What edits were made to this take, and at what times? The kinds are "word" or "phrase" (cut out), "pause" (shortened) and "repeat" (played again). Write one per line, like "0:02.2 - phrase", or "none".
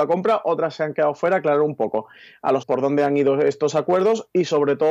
0:02.6 - word